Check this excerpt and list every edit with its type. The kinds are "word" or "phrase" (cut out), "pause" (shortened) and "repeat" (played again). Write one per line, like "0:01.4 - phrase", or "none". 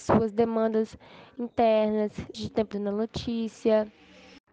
0:02.3 - word
0:02.7 - phrase